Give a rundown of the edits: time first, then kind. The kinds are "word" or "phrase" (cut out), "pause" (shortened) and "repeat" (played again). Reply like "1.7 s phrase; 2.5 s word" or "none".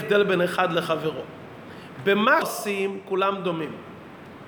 2.4 s word